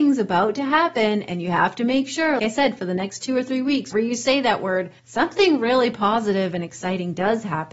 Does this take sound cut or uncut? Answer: cut